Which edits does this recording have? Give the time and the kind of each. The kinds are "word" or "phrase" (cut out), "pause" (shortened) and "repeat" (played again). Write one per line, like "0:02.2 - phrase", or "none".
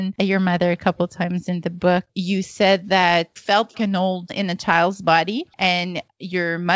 0:03.4 - word
0:03.7 - word
0:04.3 - word